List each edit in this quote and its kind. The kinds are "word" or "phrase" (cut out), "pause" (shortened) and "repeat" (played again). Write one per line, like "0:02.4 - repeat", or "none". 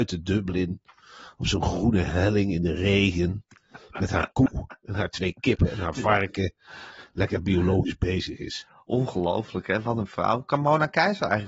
none